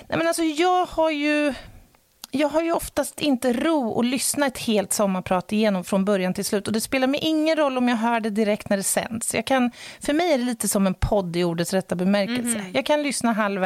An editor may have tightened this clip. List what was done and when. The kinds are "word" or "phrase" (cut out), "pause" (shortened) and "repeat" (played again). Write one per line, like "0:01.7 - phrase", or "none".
none